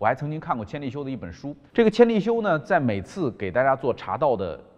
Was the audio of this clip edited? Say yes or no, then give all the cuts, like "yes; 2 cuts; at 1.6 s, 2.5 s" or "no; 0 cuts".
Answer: yes; 1 cut; at 1.7 s